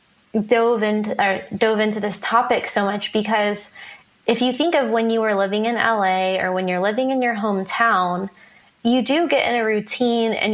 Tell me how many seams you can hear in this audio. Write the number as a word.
zero